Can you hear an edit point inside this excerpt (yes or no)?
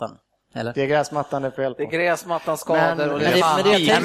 no